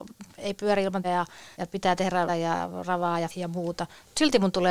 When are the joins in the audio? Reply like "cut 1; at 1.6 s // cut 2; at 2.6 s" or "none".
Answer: cut 1; at 1.0 s // cut 2; at 1.5 s // cut 3; at 2.3 s // cut 4; at 3.3 s